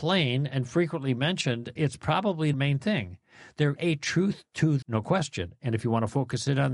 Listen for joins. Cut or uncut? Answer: cut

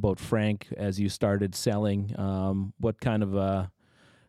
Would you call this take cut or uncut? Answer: uncut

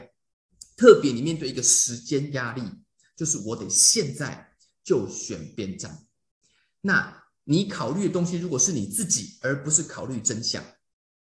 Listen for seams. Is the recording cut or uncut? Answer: uncut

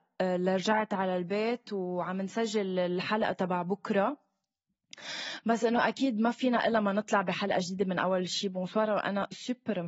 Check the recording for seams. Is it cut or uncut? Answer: uncut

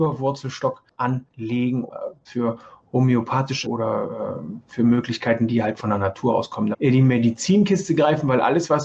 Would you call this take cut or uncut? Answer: cut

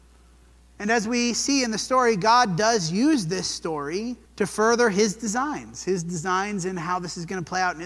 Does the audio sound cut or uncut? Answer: cut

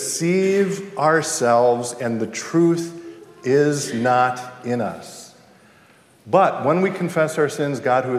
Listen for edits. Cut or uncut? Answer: uncut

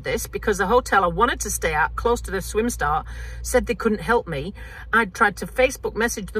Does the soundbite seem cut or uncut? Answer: uncut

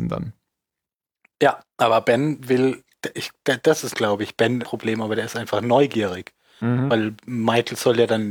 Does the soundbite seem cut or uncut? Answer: cut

